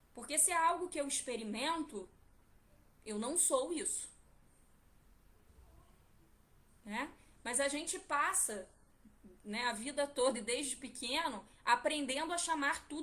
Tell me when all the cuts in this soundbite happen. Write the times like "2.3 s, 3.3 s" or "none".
none